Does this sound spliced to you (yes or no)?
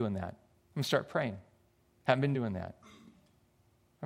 no